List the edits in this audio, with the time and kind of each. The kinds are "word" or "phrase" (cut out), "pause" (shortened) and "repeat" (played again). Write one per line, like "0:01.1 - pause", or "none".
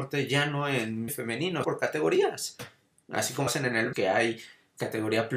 0:01.1 - word
0:01.6 - word
0:03.5 - word
0:03.9 - word

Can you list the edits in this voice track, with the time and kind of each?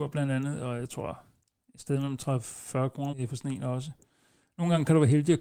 0:03.1 - word

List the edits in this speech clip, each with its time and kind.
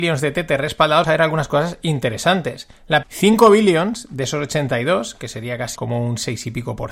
0:01.0 - word
0:03.0 - word
0:05.8 - word

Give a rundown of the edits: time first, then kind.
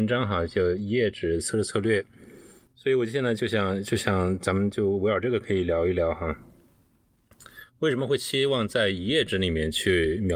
none

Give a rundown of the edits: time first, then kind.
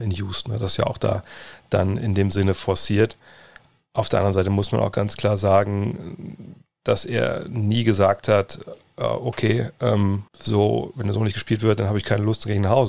0:10.3 - pause

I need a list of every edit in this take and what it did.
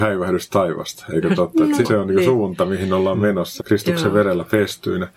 0:01.8 - word
0:03.6 - word

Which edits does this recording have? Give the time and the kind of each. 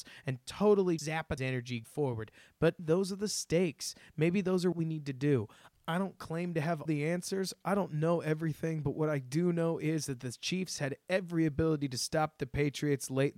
0:01.0 - word
0:01.4 - word
0:01.8 - word
0:02.8 - word
0:04.7 - word
0:06.9 - word

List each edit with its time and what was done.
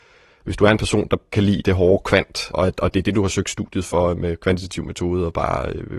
0:01.3 - word
0:02.5 - word
0:04.2 - word

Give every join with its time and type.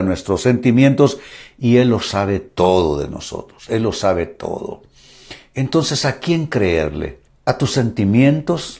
0:07.3 - pause

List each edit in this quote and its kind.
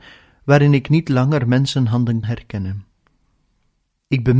0:02.2 - word

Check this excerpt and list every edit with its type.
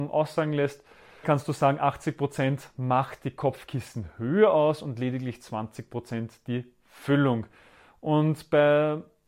0:01.2 - word

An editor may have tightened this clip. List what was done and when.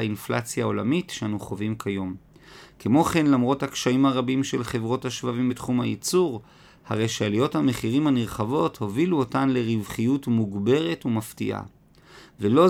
none

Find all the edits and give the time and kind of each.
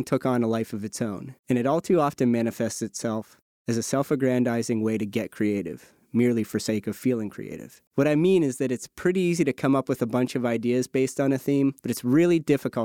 0:01.4 - pause
0:07.9 - pause
0:11.8 - pause

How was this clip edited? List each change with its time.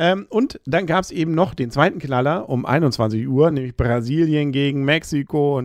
none

